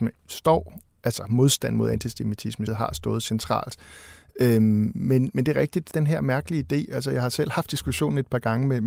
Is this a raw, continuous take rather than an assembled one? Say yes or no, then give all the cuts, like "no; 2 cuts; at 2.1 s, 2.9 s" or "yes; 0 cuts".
no; 2 cuts; at 2.7 s, 5.9 s